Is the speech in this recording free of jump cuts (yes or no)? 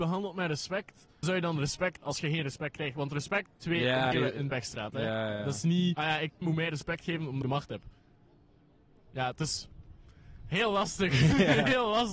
no